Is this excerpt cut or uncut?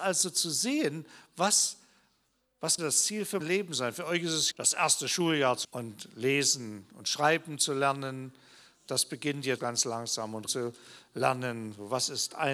cut